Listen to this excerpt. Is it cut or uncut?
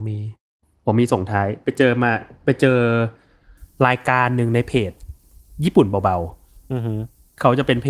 uncut